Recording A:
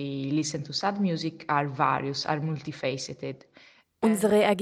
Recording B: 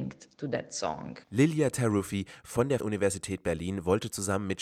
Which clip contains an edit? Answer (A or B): B